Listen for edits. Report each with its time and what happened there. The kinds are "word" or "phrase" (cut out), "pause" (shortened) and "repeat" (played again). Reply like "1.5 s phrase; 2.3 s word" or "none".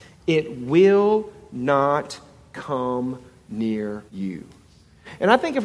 4.1 s pause